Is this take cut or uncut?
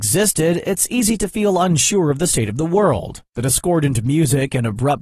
uncut